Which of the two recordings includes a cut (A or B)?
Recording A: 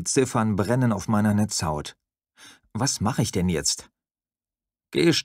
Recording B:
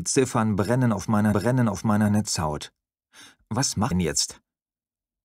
B